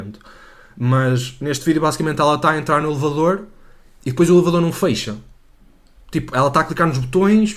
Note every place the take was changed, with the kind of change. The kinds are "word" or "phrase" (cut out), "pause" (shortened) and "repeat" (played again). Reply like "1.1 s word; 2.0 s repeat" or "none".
none